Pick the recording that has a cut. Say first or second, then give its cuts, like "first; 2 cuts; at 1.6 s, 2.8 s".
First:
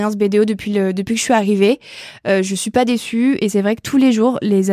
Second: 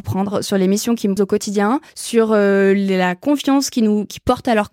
second; 2 cuts; at 1.2 s, 1.9 s